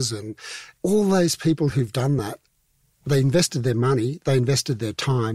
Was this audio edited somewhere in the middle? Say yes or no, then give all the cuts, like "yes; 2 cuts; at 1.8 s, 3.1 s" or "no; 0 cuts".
no; 0 cuts